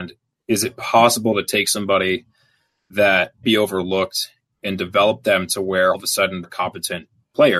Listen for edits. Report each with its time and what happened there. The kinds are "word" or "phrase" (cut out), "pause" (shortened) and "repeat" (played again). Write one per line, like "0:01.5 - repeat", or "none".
0:03.4 - word
0:05.9 - word
0:06.4 - word